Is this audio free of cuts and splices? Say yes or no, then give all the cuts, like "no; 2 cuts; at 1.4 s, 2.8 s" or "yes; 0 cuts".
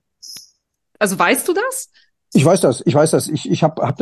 yes; 0 cuts